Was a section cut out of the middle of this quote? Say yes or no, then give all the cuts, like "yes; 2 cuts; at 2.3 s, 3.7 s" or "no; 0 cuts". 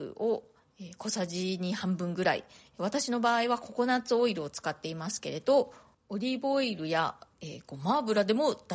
no; 0 cuts